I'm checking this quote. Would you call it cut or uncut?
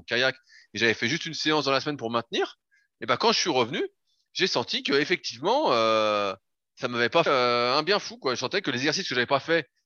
cut